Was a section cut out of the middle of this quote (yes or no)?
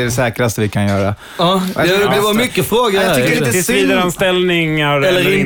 no